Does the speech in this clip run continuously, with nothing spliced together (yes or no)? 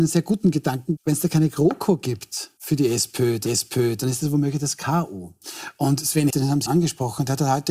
no